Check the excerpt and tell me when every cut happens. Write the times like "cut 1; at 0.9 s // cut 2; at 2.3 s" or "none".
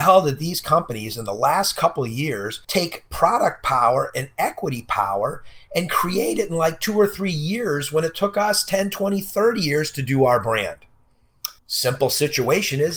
cut 1; at 2.6 s // cut 2; at 11.6 s